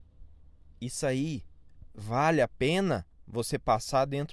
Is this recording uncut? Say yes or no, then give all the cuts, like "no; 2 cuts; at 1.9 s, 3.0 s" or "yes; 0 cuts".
yes; 0 cuts